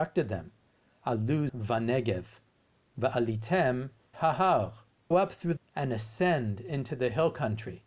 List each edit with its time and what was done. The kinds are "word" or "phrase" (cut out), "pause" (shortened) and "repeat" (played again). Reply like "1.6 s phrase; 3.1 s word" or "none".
1.5 s word; 4.1 s word; 5.1 s word; 5.6 s word